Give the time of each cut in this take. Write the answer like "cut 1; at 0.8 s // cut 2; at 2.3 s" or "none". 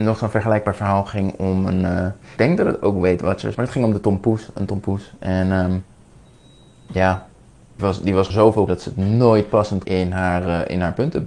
cut 1; at 2.4 s // cut 2; at 3.5 s // cut 3; at 7.8 s // cut 4; at 8.3 s // cut 5; at 8.7 s // cut 6; at 9.8 s

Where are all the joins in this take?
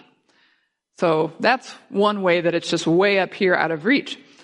none

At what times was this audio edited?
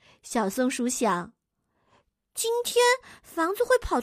none

